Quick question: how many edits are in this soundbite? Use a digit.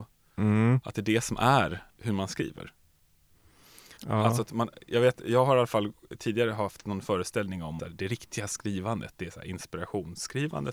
3